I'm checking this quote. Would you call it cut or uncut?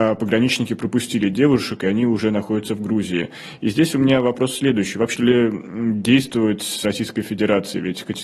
cut